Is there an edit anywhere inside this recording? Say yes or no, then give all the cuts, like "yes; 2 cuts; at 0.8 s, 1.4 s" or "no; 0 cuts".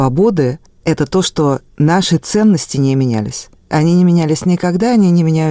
no; 0 cuts